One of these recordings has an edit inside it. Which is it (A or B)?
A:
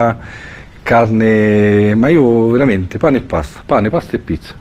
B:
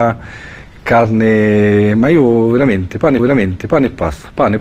B